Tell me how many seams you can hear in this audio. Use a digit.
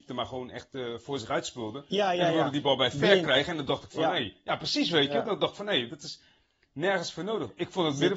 0